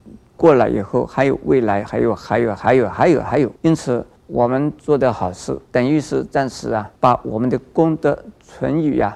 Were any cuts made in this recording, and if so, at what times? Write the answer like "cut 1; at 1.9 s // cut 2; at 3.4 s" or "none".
cut 1; at 3.6 s // cut 2; at 4.2 s // cut 3; at 5.6 s // cut 4; at 7.0 s